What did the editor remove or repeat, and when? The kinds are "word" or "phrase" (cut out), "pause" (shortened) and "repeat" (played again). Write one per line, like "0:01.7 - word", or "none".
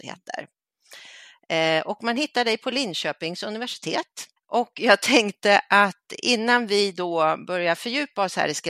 0:04.4 - pause